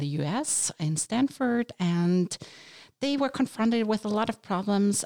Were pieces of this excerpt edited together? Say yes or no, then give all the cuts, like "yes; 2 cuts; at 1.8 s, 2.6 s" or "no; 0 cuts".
no; 0 cuts